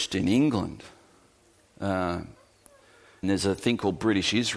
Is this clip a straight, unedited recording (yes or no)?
no